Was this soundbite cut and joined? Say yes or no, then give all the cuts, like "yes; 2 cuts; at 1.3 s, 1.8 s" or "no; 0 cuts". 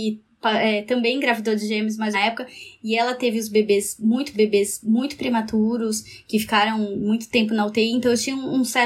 yes; 2 cuts; at 2.1 s, 4.3 s